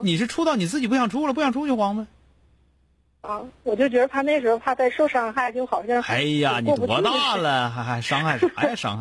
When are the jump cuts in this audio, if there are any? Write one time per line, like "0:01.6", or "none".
none

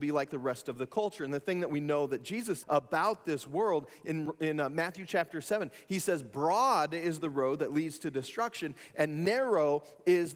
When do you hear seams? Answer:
0:02.6

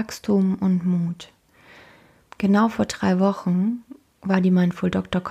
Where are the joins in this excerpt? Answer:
none

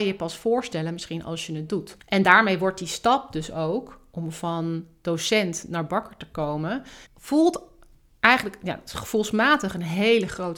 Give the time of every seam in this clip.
0:02.0
0:07.1

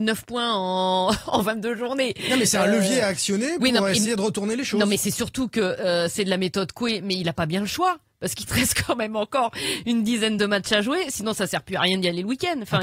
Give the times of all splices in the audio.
none

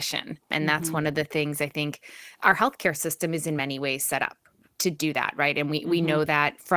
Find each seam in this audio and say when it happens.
none

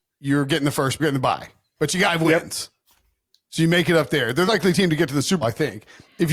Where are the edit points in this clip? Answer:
0:01.0
0:02.1
0:04.5
0:05.4

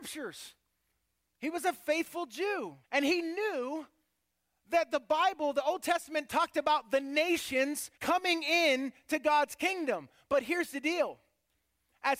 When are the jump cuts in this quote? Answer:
0:02.8
0:08.0

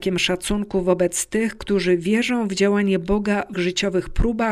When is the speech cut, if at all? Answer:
0:03.5

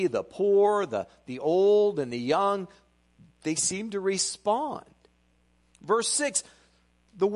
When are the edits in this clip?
none

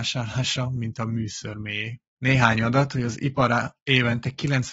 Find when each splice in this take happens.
0:02.1

